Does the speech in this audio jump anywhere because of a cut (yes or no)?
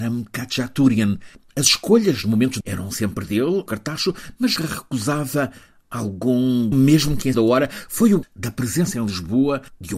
yes